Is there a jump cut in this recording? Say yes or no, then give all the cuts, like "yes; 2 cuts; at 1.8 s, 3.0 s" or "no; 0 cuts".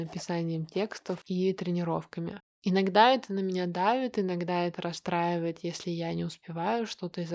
yes; 1 cut; at 2.5 s